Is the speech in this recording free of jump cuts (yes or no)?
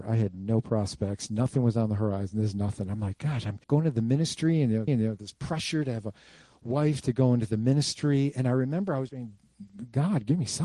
no